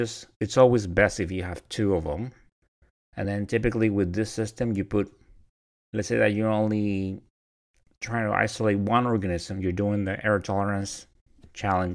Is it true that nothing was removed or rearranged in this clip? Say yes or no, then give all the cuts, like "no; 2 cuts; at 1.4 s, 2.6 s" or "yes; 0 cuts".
yes; 0 cuts